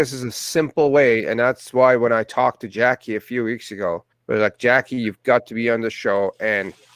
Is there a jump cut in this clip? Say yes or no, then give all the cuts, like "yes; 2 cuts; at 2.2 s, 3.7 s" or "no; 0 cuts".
yes; 1 cut; at 4.1 s